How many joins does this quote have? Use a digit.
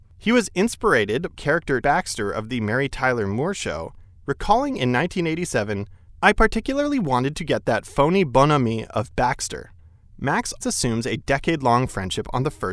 3